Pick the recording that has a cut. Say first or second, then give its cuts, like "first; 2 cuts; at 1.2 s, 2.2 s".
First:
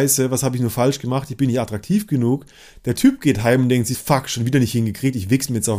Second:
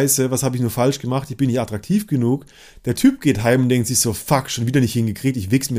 first; 1 cut; at 3.9 s